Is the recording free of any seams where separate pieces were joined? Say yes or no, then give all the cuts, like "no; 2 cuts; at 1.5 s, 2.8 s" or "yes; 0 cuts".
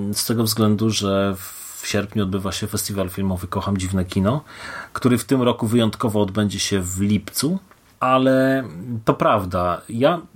yes; 0 cuts